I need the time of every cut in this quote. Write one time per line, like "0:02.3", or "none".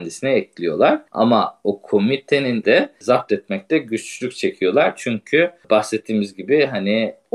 0:02.6